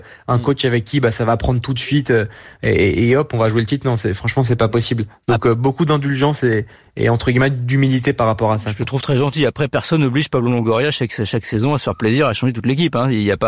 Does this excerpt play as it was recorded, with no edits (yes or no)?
yes